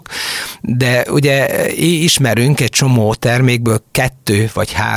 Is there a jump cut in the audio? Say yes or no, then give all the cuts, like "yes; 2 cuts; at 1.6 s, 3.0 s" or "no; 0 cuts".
no; 0 cuts